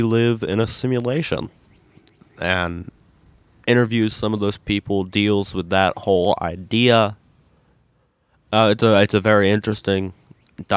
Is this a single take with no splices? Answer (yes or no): yes